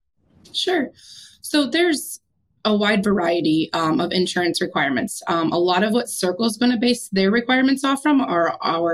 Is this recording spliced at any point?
no; 0 cuts

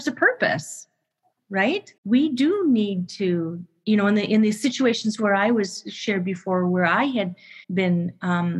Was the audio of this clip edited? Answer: yes; 2 cuts; at 2.0 s, 7.6 s

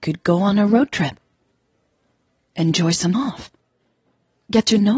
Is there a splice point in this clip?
yes; 1 cut; at 3.1 s

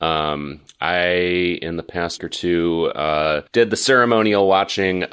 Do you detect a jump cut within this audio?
yes; 2 cuts; at 2.2 s, 3.5 s

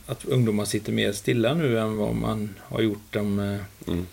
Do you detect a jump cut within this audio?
no; 0 cuts

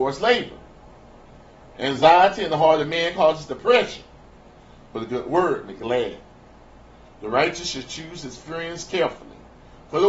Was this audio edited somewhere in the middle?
yes; 1 cut; at 5.8 s

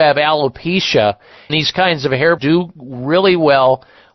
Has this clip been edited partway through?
yes; 2 cuts; at 1.5 s, 2.4 s

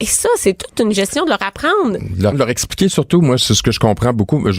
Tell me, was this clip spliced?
yes; 1 cut; at 2.3 s

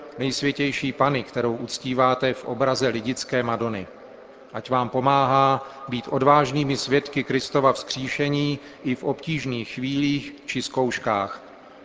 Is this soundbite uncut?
yes; 0 cuts

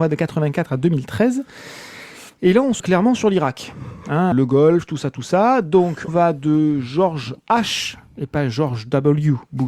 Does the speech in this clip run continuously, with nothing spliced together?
no; 3 cuts; at 2.8 s, 4.3 s, 6.1 s

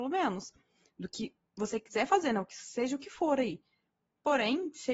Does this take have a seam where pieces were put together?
no; 0 cuts

